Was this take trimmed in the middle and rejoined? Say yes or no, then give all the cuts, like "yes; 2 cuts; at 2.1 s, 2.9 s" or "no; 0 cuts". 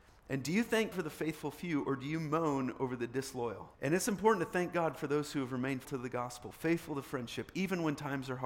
yes; 3 cuts; at 0.9 s, 3.7 s, 5.8 s